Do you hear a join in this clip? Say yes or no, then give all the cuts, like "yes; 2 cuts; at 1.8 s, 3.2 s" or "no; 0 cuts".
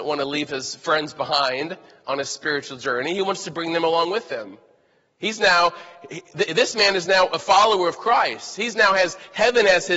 no; 0 cuts